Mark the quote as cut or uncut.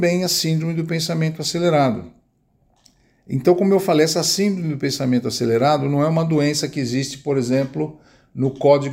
uncut